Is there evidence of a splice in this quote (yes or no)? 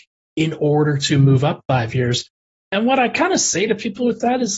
no